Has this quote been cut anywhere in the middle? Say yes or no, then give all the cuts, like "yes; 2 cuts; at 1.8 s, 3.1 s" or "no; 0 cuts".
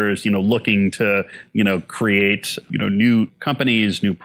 no; 0 cuts